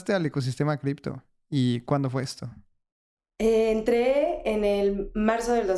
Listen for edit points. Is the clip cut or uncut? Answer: uncut